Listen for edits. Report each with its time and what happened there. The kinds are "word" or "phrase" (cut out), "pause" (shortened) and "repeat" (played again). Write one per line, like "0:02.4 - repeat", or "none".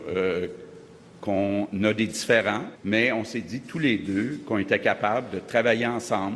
0:02.8 - pause